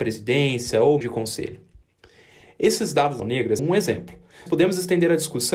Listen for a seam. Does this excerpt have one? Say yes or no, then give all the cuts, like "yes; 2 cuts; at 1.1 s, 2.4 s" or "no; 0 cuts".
yes; 4 cuts; at 1.0 s, 3.2 s, 3.6 s, 4.5 s